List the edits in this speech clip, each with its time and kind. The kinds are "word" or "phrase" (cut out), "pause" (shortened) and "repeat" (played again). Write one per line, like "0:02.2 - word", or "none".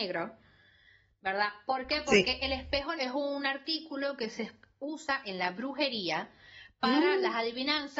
0:03.0 - word